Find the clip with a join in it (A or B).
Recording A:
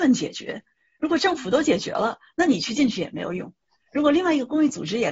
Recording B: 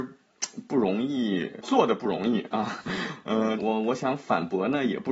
B